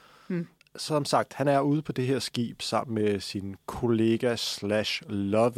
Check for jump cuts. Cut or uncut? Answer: uncut